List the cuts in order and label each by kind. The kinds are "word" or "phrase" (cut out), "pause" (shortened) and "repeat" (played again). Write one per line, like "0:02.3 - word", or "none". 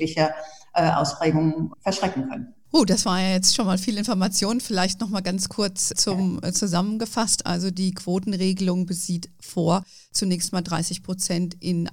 0:01.7 - word
0:05.9 - word